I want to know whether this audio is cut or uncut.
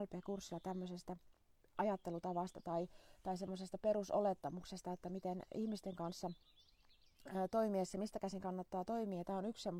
uncut